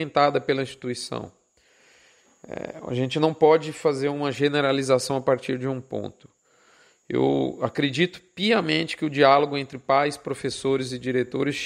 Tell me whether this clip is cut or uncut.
uncut